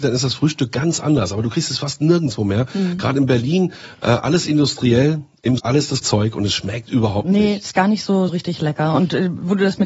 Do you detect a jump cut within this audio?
yes; 3 cuts; at 5.6 s, 6.0 s, 8.3 s

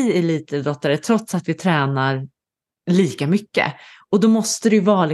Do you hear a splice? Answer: no; 0 cuts

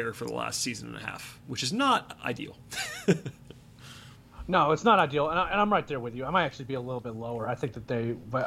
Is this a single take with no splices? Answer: yes; 0 cuts

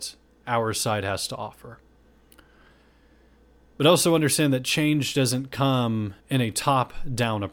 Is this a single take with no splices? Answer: no; 1 cut; at 6.2 s

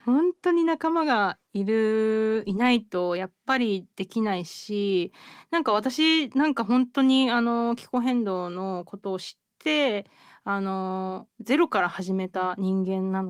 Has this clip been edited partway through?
yes; 3 cuts; at 3.9 s, 9.5 s, 11.3 s

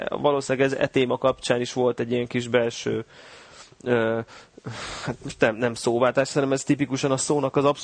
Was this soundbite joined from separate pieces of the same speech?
no; 0 cuts

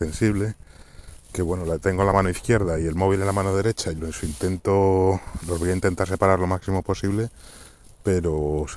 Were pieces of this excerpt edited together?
no; 0 cuts

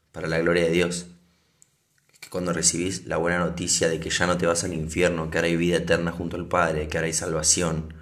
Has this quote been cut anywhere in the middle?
no; 0 cuts

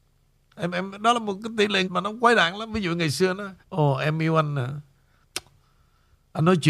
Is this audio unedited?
no; 2 cuts; at 1.8 s, 3.6 s

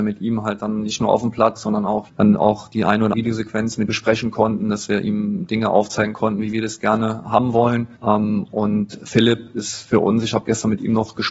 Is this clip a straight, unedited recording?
no; 4 cuts; at 2.1 s, 3.1 s, 3.9 s, 8.0 s

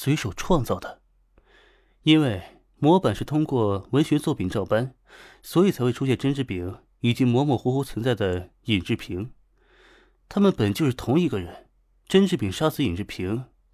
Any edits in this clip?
no; 0 cuts

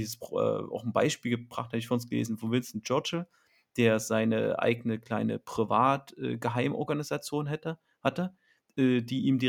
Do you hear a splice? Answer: no; 0 cuts

